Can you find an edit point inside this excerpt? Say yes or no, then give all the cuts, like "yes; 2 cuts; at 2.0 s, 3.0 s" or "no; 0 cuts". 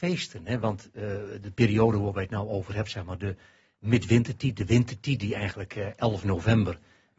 no; 0 cuts